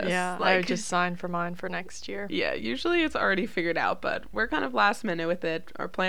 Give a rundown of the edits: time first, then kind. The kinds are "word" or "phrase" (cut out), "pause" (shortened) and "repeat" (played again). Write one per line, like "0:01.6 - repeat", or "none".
none